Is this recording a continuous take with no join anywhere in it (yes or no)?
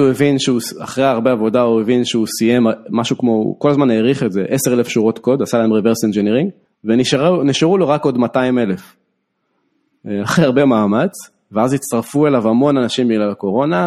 no